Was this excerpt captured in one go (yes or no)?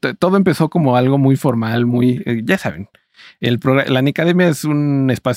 yes